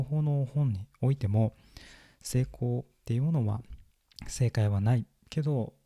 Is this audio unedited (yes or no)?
no